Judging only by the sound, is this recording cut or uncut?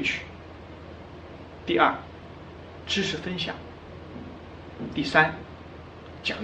uncut